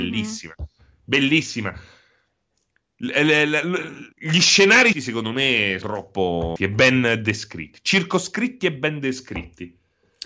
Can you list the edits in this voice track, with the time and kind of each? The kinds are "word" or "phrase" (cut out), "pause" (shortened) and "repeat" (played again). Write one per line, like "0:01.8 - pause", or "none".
0:04.1 - pause
0:04.9 - word
0:05.8 - word
0:06.6 - word